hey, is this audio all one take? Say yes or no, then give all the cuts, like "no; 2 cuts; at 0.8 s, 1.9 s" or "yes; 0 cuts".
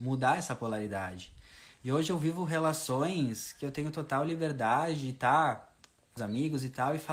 no; 1 cut; at 6.2 s